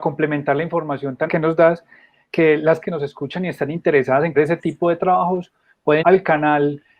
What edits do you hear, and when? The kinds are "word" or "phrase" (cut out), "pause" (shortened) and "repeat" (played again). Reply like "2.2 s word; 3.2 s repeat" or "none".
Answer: 1.3 s word; 2.8 s word; 4.3 s word; 6.0 s word